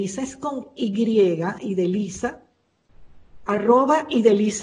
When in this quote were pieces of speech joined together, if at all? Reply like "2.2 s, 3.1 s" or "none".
none